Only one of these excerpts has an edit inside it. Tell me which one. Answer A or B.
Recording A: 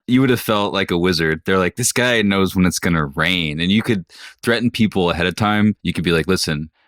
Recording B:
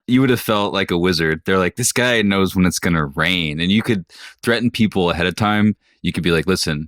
A